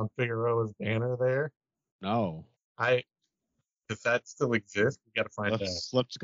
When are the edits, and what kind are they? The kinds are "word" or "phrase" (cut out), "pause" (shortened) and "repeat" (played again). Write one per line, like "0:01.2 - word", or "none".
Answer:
0:02.5 - pause